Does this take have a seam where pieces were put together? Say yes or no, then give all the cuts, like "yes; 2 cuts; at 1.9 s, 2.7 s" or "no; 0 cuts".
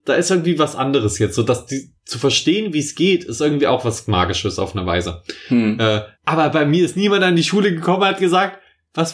yes; 1 cut; at 6.1 s